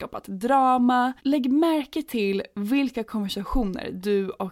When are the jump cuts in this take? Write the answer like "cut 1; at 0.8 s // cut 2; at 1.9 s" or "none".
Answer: cut 1; at 1.2 s